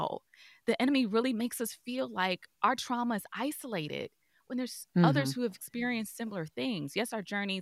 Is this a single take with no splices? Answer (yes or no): yes